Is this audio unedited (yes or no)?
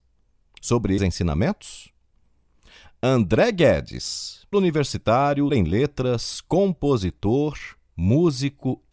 no